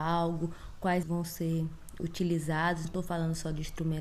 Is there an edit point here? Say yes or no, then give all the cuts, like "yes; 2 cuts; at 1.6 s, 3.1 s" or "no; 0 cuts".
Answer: yes; 2 cuts; at 1.0 s, 2.8 s